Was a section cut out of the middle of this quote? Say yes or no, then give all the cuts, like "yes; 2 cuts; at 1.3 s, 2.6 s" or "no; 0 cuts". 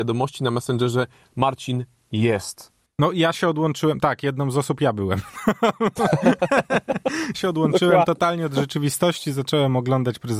yes; 1 cut; at 7.3 s